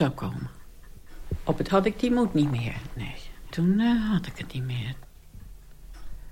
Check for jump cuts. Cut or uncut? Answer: cut